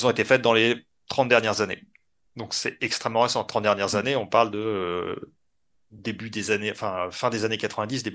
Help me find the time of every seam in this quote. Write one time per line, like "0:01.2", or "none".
none